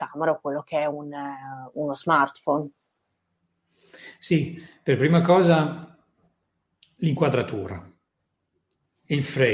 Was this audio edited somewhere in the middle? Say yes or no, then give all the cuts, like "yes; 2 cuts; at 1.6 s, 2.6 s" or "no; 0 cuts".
no; 0 cuts